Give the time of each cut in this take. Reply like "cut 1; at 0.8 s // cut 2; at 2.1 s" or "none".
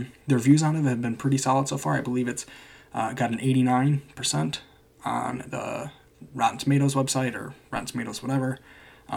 none